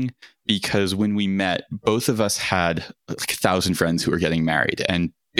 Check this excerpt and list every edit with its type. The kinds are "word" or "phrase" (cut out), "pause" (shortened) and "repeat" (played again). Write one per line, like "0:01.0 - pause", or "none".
none